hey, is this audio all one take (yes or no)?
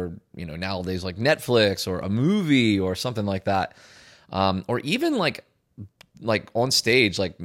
yes